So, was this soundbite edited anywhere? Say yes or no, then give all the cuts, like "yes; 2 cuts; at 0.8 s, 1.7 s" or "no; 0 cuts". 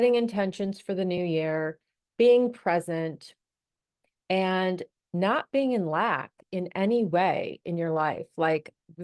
no; 0 cuts